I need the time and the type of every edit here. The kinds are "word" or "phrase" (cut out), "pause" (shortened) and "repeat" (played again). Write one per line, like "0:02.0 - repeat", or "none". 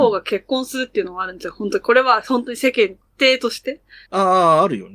0:04.0 - pause